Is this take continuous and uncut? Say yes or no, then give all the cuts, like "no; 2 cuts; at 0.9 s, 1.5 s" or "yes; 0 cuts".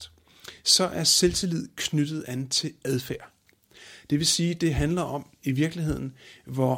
yes; 0 cuts